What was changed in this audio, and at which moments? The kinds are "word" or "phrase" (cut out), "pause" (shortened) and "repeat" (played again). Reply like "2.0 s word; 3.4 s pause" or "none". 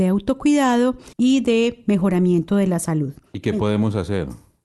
1.1 s pause